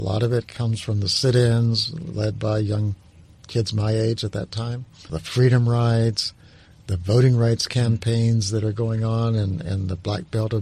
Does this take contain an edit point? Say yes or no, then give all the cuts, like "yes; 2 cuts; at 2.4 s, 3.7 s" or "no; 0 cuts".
no; 0 cuts